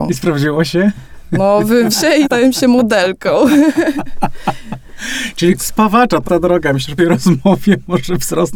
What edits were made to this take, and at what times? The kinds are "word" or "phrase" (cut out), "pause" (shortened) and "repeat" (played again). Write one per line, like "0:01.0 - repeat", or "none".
0:01.9 - word
0:02.2 - word
0:05.6 - word
0:06.2 - word
0:07.0 - word